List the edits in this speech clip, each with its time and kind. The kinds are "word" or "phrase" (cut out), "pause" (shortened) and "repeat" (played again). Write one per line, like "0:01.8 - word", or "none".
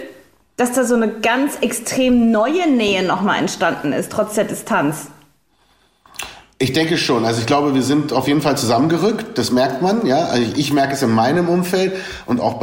none